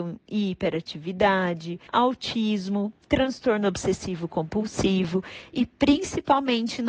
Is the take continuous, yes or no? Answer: no